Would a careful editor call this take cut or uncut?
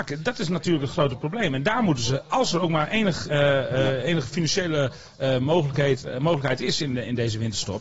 cut